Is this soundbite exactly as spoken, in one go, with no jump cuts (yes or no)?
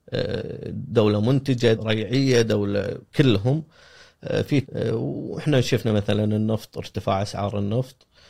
no